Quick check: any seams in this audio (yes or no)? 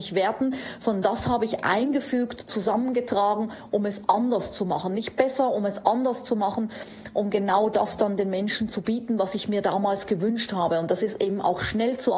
no